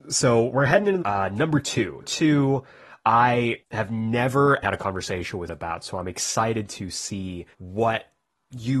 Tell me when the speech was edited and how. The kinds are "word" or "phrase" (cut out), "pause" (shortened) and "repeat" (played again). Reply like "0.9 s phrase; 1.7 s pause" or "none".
1.0 s phrase; 2.0 s word; 3.6 s pause; 4.6 s word; 5.5 s word; 7.5 s pause